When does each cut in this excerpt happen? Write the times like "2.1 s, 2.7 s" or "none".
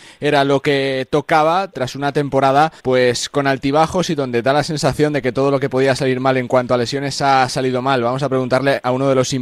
2.8 s